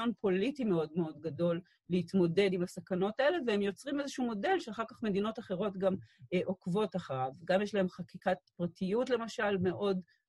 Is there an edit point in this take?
no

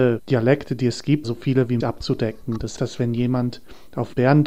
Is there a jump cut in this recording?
yes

